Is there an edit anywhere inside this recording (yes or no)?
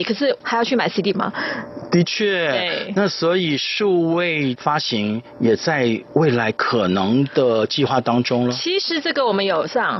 yes